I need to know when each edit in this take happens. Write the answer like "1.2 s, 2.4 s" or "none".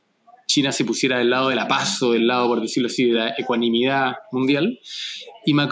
none